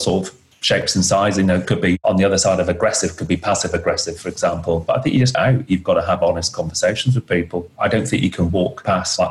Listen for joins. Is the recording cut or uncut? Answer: cut